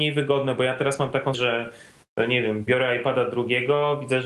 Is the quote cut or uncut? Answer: cut